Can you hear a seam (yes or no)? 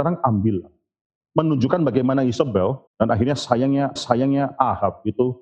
yes